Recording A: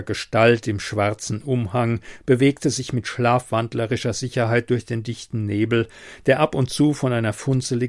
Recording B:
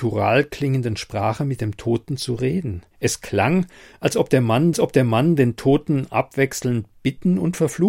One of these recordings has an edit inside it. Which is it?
B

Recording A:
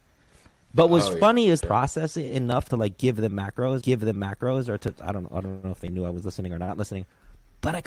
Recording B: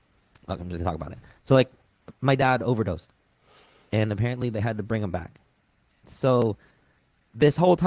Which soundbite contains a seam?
A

